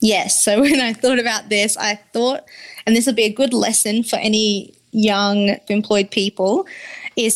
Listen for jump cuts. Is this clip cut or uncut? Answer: cut